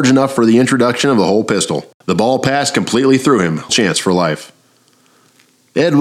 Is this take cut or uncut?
cut